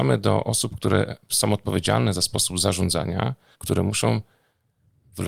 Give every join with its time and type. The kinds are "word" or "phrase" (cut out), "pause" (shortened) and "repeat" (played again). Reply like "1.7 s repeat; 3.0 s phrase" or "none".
3.5 s pause